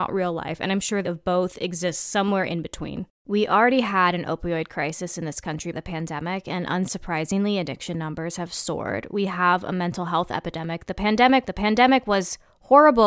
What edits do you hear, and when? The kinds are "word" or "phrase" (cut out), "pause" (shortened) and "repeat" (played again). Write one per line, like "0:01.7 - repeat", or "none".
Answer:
0:01.0 - word
0:05.7 - word
0:11.5 - repeat